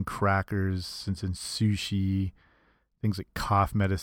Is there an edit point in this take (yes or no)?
no